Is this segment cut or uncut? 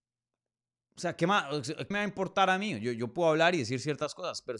cut